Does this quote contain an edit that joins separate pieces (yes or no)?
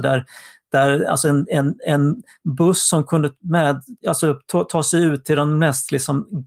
yes